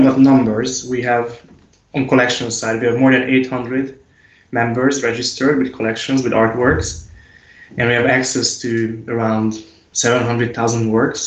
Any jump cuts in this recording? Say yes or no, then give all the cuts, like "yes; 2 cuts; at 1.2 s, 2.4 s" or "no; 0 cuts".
no; 0 cuts